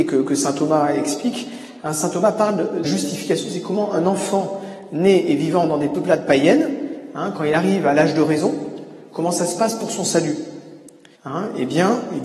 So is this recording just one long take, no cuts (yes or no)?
no